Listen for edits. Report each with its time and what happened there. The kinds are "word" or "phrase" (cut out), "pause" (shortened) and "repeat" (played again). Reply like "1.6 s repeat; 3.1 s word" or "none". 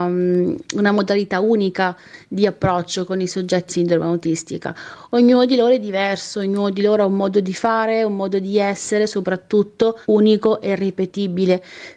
3.7 s word; 10.0 s pause